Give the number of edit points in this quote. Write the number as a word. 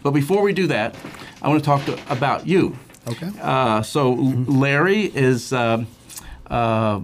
zero